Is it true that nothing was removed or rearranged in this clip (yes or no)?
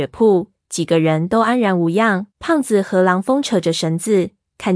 no